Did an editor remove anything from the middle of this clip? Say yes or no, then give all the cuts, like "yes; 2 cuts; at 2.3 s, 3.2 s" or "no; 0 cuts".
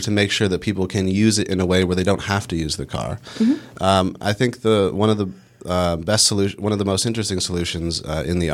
no; 0 cuts